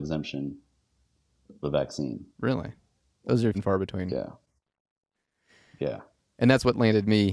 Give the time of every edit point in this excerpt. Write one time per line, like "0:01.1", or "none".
0:01.6
0:02.3
0:03.5